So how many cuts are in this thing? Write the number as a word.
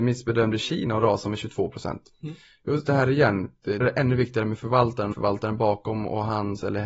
three